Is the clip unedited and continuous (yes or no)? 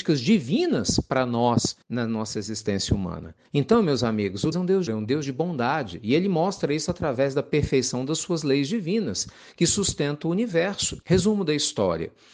no